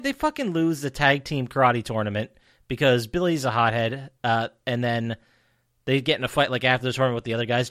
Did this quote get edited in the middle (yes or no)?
no